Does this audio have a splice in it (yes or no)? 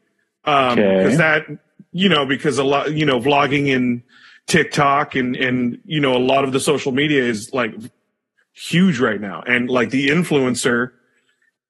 no